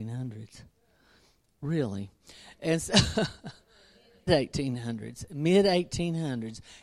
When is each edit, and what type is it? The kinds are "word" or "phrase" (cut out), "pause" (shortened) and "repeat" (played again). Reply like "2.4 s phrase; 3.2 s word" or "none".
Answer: 4.3 s word